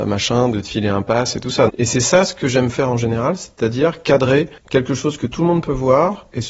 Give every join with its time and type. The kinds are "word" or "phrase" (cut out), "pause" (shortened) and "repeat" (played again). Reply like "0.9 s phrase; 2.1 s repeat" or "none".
1.7 s word; 4.6 s pause